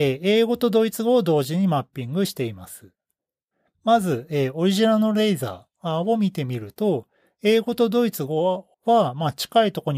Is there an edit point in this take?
yes; 1 cut; at 8.7 s

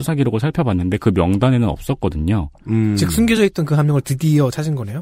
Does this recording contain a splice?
no; 0 cuts

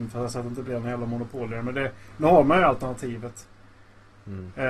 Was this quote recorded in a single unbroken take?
yes; 0 cuts

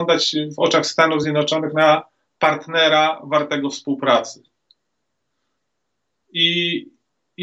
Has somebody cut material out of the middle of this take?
no; 0 cuts

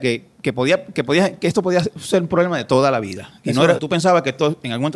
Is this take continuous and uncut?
no; 1 cut; at 3.8 s

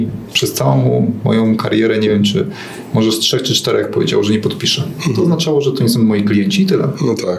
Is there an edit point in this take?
no; 0 cuts

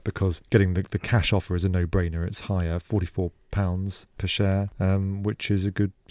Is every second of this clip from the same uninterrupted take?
yes; 0 cuts

